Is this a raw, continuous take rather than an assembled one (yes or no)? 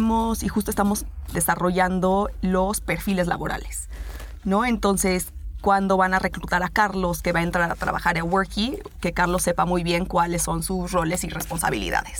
yes